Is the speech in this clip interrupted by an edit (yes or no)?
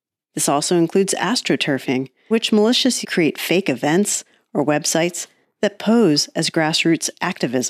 yes